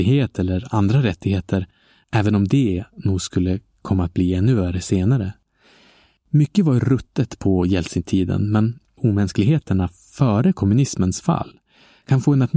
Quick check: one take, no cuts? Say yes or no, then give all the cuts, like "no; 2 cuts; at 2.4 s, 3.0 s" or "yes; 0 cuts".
no; 1 cut; at 9.0 s